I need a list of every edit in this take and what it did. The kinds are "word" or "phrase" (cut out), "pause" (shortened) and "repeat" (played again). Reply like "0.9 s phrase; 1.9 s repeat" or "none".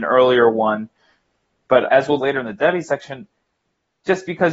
1.9 s word; 2.2 s word